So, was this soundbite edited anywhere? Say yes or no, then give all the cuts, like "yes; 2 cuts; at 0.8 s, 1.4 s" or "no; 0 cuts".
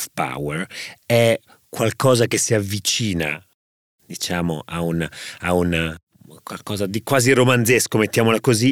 no; 0 cuts